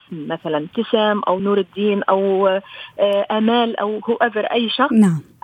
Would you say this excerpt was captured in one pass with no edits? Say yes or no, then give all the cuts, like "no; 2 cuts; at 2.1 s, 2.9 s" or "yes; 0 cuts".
yes; 0 cuts